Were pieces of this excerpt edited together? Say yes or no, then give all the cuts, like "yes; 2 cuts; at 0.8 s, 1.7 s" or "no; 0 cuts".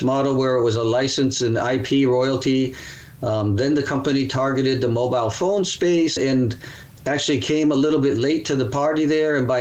yes; 2 cuts; at 6.2 s, 7.0 s